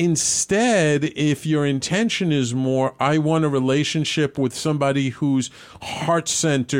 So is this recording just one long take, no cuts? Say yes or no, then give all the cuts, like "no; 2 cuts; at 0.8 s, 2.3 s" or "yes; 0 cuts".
yes; 0 cuts